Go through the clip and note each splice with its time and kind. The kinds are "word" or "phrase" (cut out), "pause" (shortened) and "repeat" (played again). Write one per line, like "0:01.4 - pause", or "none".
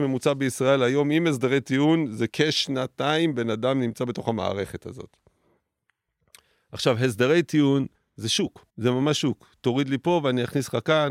0:02.3 - word
0:08.0 - pause
0:08.7 - pause